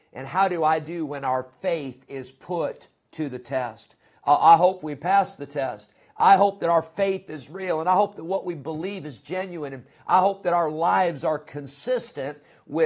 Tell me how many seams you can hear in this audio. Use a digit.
0